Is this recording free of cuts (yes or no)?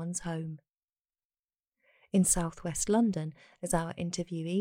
yes